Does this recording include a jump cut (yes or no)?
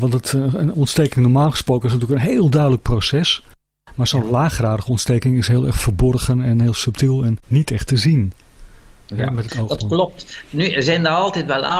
yes